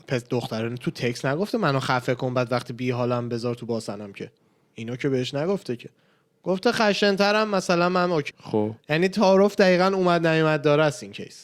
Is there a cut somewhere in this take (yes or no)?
yes